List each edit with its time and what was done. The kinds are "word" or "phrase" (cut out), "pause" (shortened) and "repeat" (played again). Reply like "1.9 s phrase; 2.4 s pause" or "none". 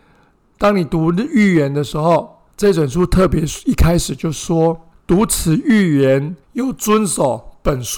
2.5 s pause; 4.9 s pause; 6.4 s pause